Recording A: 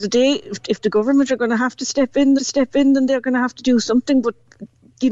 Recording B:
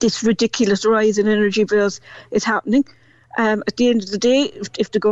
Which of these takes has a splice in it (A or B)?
A